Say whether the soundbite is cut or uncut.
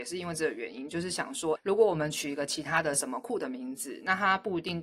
cut